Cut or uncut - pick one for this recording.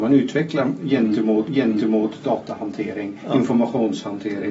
cut